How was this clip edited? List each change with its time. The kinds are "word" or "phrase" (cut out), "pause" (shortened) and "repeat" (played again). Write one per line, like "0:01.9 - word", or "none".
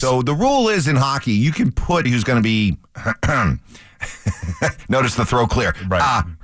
0:02.0 - word